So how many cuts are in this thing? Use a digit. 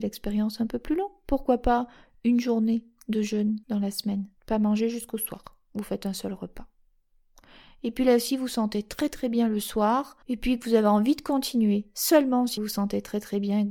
4